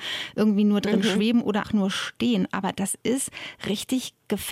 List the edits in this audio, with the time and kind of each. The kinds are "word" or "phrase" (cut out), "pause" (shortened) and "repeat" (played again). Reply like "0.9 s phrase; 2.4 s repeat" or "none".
1.6 s word